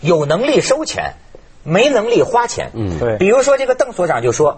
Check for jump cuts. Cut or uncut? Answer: uncut